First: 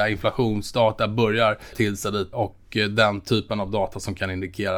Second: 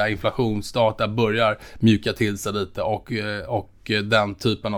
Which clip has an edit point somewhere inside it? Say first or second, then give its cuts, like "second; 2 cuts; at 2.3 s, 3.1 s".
first; 2 cuts; at 1.7 s, 2.3 s